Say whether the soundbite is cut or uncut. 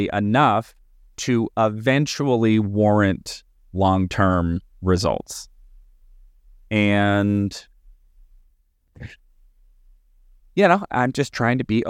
uncut